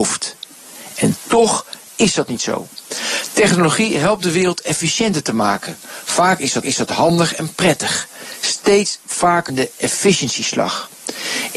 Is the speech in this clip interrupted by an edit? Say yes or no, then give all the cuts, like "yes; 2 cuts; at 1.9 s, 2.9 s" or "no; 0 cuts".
yes; 2 cuts; at 6.6 s, 9.5 s